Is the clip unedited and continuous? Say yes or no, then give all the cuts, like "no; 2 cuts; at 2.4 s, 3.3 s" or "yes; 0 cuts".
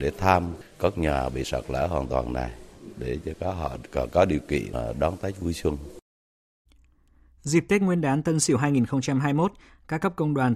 yes; 0 cuts